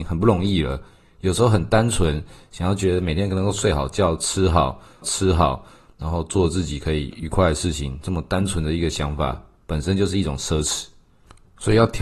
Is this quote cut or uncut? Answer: cut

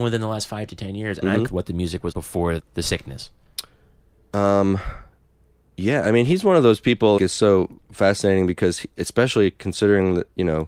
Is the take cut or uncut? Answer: cut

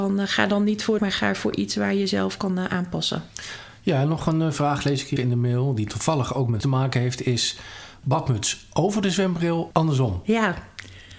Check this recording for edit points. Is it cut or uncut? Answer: cut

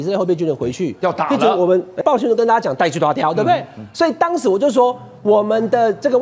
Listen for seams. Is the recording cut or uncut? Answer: cut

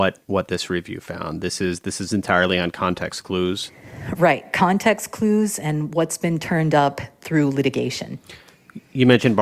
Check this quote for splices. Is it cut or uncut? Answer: uncut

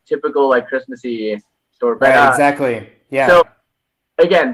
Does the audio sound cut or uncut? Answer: uncut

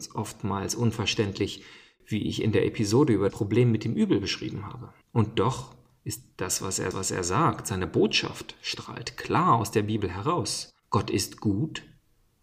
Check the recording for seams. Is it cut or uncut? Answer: cut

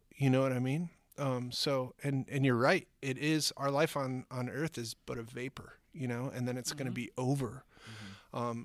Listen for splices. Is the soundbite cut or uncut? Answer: uncut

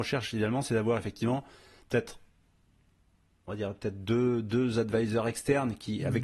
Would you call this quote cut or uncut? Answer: uncut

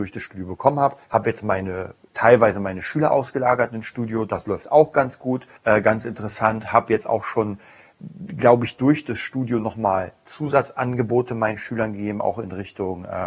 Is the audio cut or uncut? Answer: cut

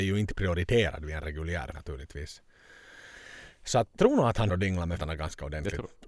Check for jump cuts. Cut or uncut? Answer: cut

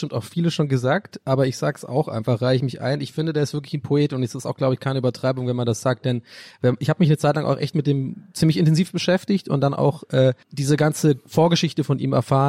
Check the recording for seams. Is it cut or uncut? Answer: cut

